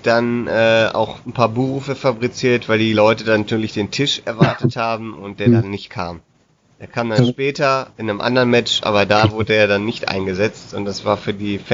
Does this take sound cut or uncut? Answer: uncut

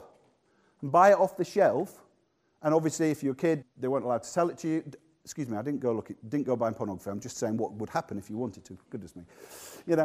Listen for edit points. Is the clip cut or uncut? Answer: cut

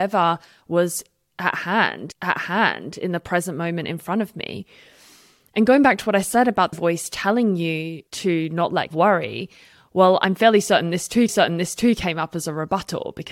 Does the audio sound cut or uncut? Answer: cut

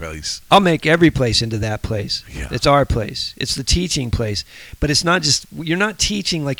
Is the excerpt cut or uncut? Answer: uncut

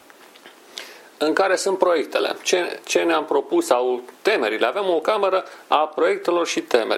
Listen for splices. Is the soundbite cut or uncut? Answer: cut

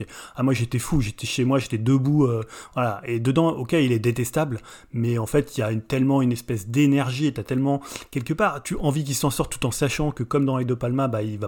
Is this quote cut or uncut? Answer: uncut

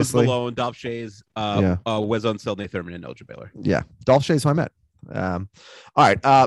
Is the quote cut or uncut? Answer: uncut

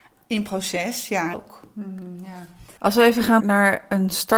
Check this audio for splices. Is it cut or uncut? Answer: cut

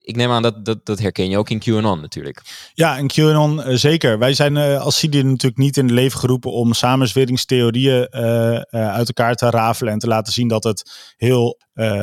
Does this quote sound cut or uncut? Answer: uncut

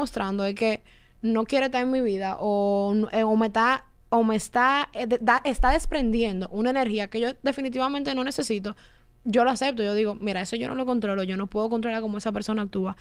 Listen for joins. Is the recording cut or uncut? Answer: uncut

